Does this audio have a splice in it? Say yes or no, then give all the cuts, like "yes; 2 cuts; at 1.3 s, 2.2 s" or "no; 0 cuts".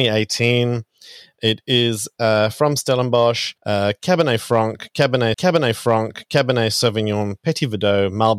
yes; 2 cuts; at 3.6 s, 5.3 s